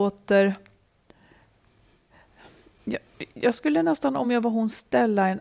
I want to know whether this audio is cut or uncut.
uncut